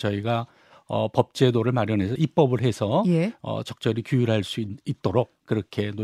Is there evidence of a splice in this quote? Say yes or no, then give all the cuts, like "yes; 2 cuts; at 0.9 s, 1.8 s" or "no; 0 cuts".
no; 0 cuts